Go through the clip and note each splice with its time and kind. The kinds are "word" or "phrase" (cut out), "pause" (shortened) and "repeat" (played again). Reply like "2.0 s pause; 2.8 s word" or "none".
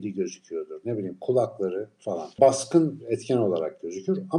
2.0 s word; 3.0 s word